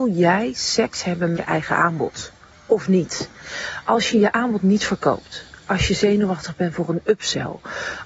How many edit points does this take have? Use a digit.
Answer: 1